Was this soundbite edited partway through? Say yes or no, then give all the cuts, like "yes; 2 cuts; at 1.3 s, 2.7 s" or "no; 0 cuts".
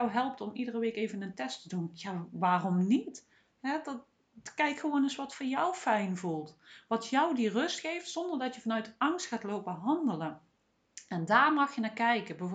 yes; 1 cut; at 3.5 s